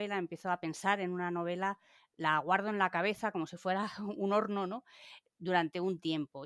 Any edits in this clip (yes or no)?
no